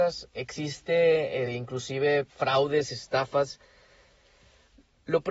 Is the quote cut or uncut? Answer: cut